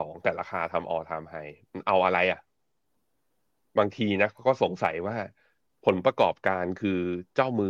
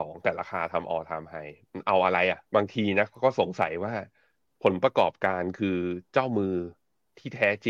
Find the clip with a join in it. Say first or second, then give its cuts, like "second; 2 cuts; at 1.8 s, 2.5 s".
second; 1 cut; at 2.5 s